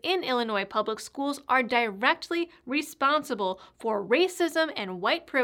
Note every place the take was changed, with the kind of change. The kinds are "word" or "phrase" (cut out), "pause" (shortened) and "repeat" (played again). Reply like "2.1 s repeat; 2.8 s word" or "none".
none